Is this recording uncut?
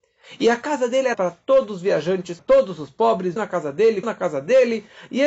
no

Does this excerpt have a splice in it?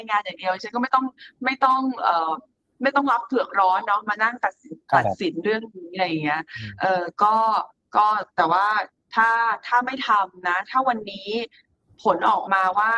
no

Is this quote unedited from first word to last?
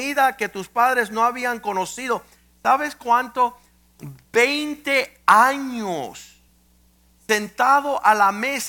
yes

